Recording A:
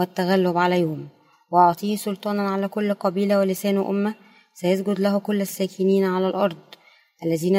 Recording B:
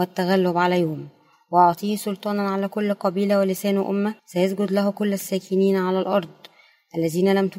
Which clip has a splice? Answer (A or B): B